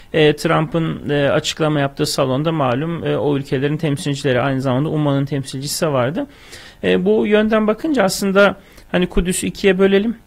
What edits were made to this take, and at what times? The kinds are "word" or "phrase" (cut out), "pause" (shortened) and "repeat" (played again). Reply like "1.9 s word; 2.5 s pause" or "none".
none